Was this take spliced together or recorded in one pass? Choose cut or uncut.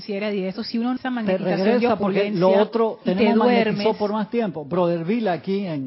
cut